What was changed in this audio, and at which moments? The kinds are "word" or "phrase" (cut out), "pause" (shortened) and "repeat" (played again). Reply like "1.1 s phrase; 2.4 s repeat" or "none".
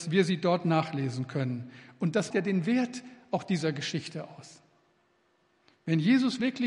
2.3 s word

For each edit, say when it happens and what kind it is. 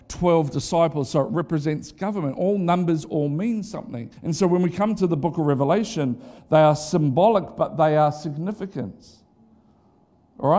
4.2 s pause

